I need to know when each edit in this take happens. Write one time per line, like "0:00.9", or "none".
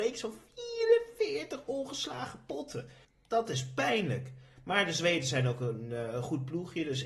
none